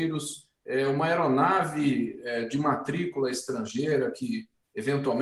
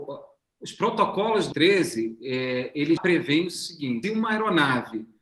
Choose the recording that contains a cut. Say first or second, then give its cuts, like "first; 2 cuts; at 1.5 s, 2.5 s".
second; 3 cuts; at 1.5 s, 3.0 s, 4.0 s